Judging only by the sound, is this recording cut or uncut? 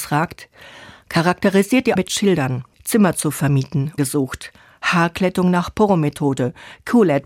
cut